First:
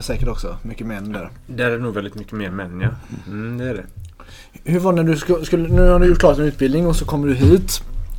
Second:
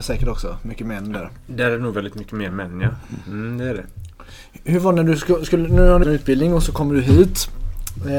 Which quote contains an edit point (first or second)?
second